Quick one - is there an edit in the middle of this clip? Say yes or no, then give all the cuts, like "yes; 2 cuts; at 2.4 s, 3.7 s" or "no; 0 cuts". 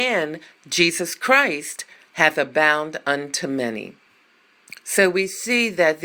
no; 0 cuts